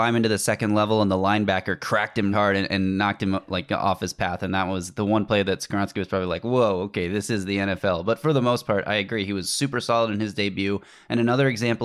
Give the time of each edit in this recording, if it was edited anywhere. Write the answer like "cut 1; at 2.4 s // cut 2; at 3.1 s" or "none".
cut 1; at 2.3 s